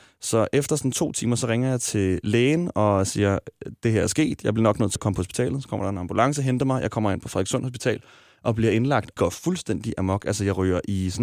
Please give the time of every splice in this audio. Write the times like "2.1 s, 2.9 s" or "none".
5.0 s, 9.2 s